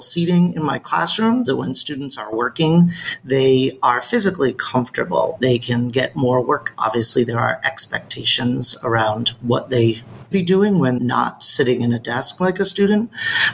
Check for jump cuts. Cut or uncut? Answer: cut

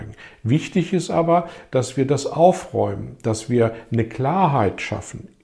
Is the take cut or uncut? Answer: uncut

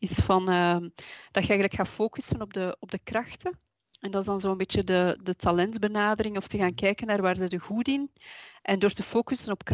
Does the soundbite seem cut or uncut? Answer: uncut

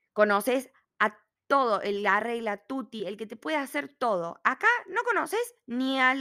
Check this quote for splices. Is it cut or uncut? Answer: uncut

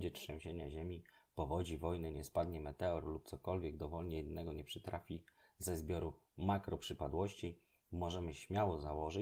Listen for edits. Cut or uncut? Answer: uncut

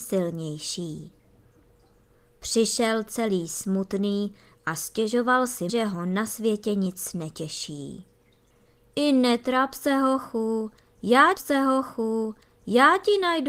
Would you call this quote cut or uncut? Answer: cut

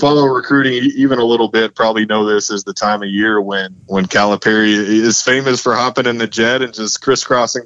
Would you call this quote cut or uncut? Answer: cut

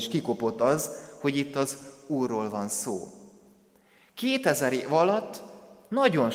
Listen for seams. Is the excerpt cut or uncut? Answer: uncut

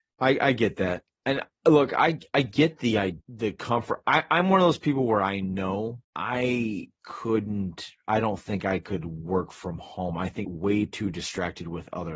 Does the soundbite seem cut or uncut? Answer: cut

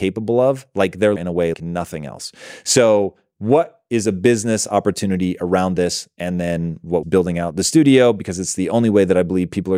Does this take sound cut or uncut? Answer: cut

